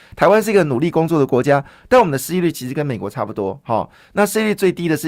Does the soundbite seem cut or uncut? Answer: uncut